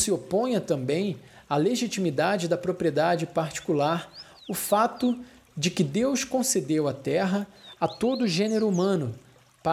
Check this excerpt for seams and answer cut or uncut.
uncut